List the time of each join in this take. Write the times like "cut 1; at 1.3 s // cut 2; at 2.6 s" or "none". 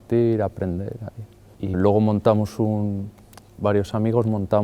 cut 1; at 1.7 s // cut 2; at 3.6 s